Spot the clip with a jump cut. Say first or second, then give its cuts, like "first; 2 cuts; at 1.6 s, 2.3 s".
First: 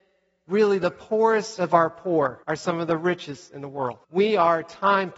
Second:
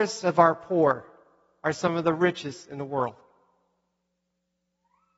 first; 2 cuts; at 2.4 s, 4.0 s